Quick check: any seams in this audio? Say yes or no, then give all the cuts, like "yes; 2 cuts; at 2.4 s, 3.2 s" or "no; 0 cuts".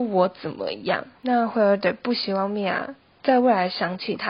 yes; 1 cut; at 3.1 s